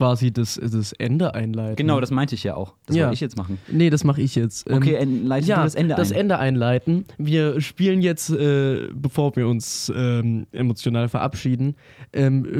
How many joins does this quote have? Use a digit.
1